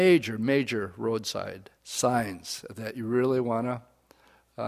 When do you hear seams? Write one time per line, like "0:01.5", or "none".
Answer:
0:01.8